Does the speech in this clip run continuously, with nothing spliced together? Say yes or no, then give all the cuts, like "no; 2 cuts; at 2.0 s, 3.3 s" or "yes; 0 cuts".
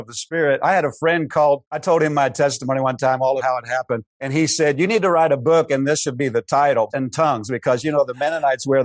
no; 4 cuts; at 1.7 s, 3.4 s, 4.1 s, 6.9 s